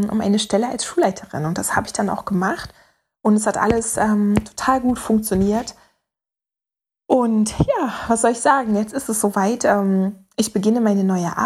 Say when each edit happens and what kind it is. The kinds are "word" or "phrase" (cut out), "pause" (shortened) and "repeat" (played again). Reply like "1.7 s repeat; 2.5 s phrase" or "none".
none